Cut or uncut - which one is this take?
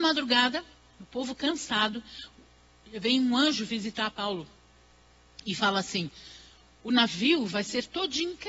uncut